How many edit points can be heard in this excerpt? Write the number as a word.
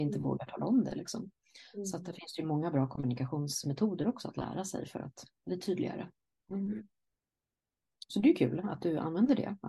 zero